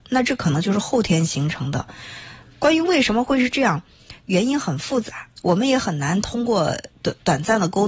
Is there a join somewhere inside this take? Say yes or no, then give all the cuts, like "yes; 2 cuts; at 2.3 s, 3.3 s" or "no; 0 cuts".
yes; 2 cuts; at 5.4 s, 6.9 s